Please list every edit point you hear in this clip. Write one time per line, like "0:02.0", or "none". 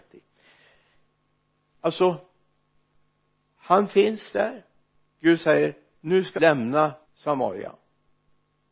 0:06.4
0:07.0